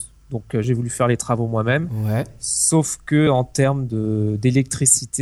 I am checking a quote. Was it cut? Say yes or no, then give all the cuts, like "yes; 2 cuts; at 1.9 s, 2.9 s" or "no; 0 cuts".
no; 0 cuts